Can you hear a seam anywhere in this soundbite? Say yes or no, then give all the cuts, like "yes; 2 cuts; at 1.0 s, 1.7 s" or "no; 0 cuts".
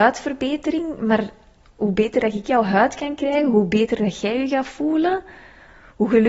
no; 0 cuts